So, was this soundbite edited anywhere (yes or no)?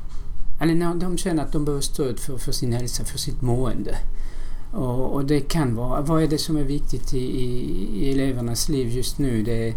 no